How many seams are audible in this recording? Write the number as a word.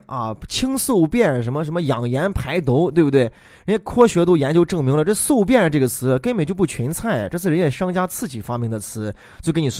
zero